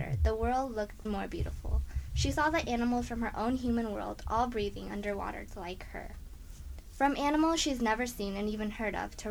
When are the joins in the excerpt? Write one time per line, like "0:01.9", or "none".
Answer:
0:01.1
0:05.5